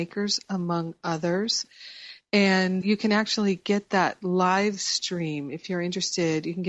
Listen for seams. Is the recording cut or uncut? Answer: cut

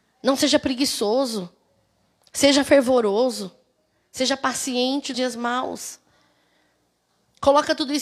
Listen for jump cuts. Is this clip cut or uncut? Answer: cut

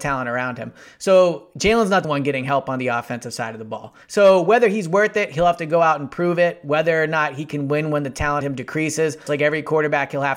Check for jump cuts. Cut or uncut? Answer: cut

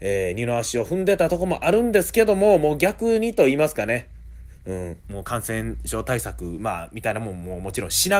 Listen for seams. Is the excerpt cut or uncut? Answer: cut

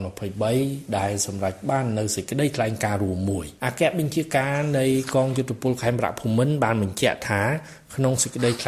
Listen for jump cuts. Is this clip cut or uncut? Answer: cut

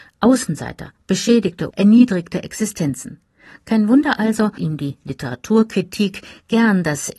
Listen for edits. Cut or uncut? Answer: cut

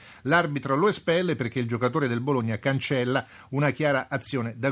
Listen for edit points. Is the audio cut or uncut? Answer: uncut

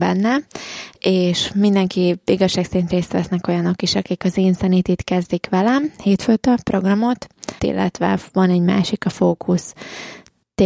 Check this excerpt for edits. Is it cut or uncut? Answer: cut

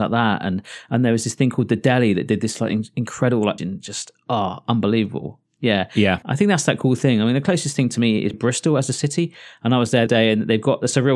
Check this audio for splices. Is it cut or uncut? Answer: cut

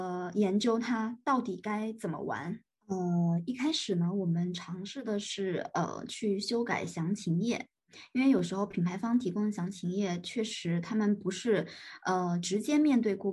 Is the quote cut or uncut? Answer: uncut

